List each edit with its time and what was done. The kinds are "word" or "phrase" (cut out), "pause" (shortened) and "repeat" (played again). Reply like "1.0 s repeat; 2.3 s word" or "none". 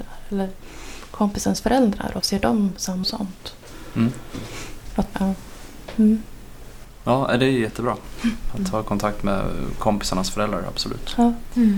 2.2 s word; 3.0 s phrase; 5.1 s word